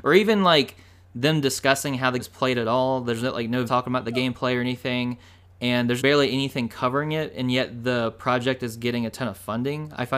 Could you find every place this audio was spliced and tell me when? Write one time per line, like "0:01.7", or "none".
0:02.2
0:03.7
0:06.0